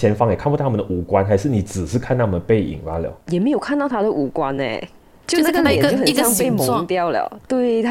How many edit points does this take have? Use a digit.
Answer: 0